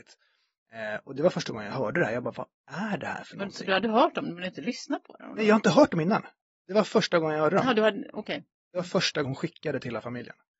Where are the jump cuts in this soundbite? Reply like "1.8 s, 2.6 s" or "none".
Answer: 9.2 s

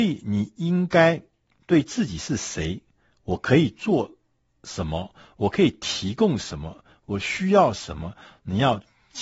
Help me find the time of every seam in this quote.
none

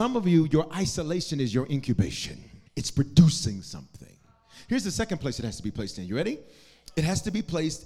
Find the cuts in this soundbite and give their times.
2.7 s

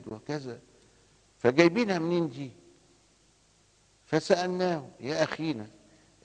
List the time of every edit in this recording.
none

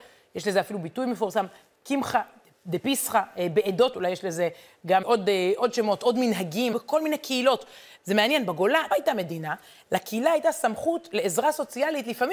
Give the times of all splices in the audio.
3.9 s, 5.0 s, 6.7 s, 8.9 s

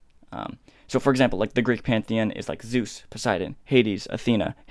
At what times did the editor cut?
none

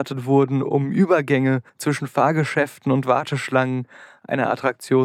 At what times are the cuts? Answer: 1.7 s

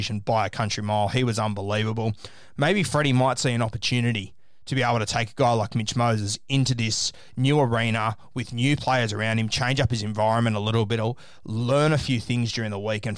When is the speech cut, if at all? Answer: none

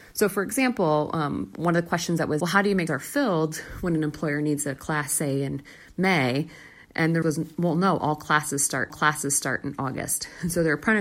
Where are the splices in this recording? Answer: 2.4 s, 2.9 s, 7.2 s, 8.9 s

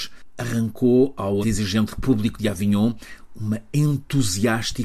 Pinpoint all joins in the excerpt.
1.4 s

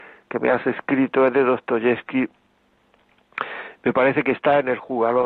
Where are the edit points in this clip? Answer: none

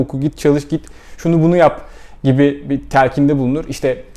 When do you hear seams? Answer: none

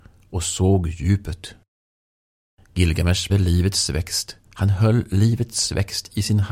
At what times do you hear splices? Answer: 3.3 s, 4.4 s

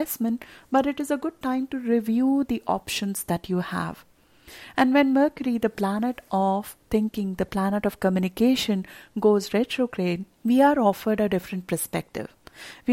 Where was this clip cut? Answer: 10.3 s

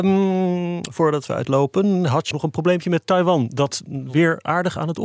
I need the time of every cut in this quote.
1.4 s, 2.3 s

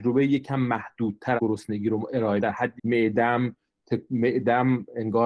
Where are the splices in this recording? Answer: 1.4 s, 2.4 s, 2.8 s

